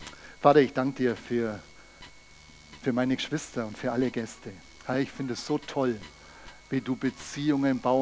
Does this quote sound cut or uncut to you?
uncut